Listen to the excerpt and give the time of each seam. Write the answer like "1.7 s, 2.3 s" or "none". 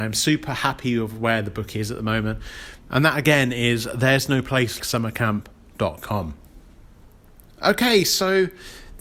2.8 s, 4.8 s